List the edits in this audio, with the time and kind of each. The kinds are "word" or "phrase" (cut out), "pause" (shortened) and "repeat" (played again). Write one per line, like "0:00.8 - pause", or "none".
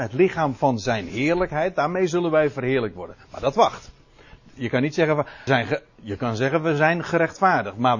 0:05.5 - word